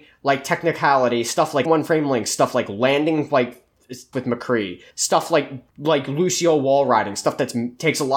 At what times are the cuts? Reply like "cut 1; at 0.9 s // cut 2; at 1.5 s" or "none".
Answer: cut 1; at 1.7 s // cut 2; at 4.1 s // cut 3; at 4.9 s // cut 4; at 5.7 s

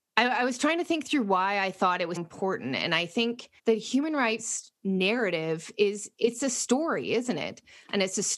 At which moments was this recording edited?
cut 1; at 2.2 s // cut 2; at 3.6 s

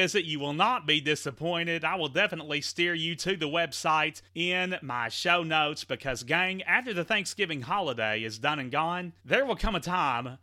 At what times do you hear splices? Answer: cut 1; at 4.3 s // cut 2; at 9.2 s

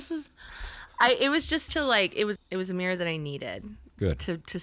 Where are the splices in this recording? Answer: cut 1; at 1.7 s // cut 2; at 2.4 s

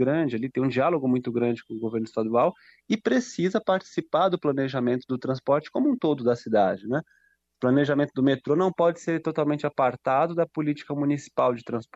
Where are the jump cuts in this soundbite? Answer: none

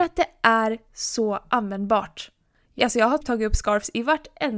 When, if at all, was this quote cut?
cut 1; at 2.8 s // cut 2; at 3.2 s

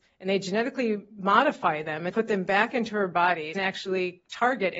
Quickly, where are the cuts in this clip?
cut 1; at 2.1 s // cut 2; at 3.5 s

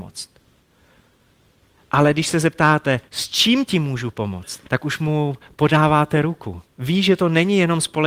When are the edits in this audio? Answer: cut 1; at 3.1 s // cut 2; at 4.7 s // cut 3; at 6.7 s

